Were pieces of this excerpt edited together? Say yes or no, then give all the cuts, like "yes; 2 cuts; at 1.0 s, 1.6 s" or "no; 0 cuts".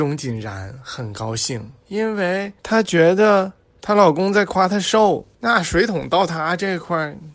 yes; 3 cuts; at 1.8 s, 2.6 s, 5.3 s